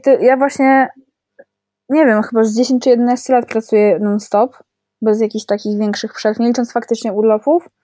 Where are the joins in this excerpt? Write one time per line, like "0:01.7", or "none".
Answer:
none